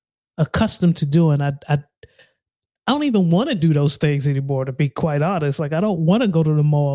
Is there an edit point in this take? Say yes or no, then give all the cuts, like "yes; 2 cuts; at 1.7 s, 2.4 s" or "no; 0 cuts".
no; 0 cuts